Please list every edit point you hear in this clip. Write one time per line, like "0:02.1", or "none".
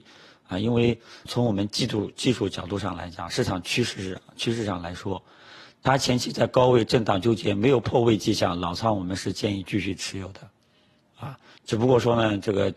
0:01.3